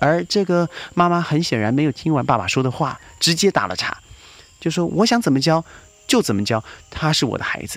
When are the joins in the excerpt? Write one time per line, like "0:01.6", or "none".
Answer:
none